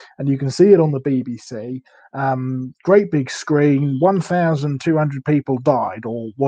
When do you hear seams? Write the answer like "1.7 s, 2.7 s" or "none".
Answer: none

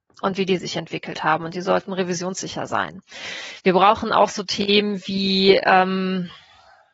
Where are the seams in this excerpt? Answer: none

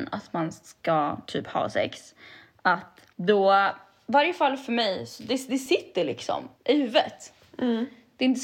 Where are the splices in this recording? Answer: 1.2 s, 3.1 s, 6.5 s

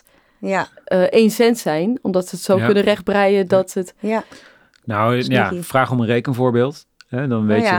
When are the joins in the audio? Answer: none

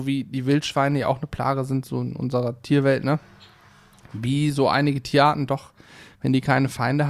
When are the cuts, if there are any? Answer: none

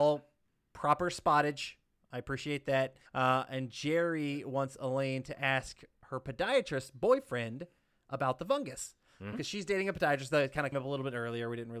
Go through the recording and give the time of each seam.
3.1 s, 9.3 s, 10.7 s

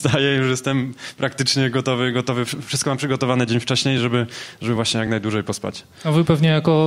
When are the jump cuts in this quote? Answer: none

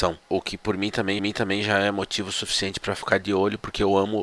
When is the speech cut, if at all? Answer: 1.2 s

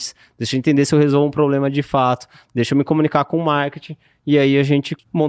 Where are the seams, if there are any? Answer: none

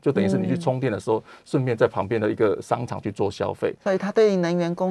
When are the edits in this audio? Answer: none

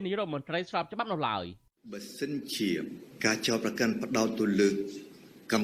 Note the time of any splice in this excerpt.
none

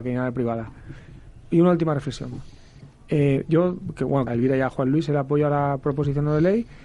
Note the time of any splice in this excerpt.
4.3 s

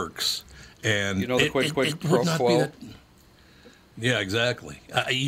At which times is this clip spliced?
1.7 s

